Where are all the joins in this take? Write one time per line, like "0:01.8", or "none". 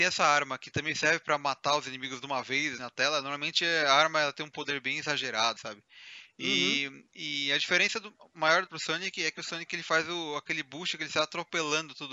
0:02.8
0:05.6
0:08.7